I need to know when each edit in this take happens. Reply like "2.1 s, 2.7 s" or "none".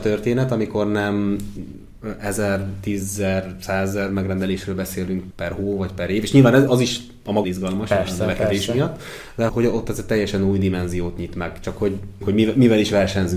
5.3 s, 6.7 s, 7.4 s, 9.5 s, 12.2 s